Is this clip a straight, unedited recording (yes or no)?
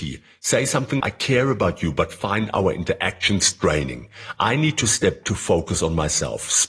no